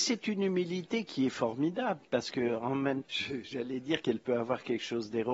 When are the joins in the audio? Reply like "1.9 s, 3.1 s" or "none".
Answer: 3.0 s